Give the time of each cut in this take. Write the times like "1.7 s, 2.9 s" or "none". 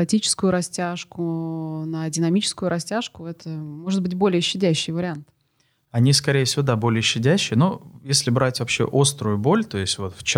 3.4 s